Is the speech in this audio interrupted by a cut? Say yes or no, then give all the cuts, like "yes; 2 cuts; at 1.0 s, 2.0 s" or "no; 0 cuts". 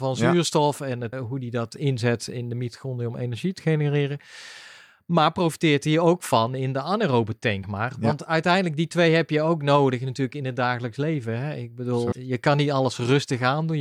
yes; 3 cuts; at 1.1 s, 7.6 s, 12.1 s